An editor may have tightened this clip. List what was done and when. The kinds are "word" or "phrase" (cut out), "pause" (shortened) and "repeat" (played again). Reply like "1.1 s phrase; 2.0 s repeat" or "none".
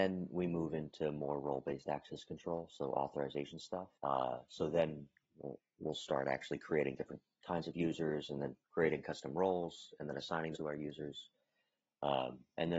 3.9 s pause; 8.6 s pause; 10.5 s word